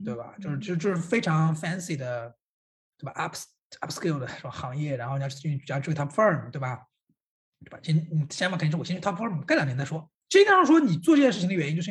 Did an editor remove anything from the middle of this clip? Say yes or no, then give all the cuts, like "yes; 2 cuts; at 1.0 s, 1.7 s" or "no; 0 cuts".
no; 0 cuts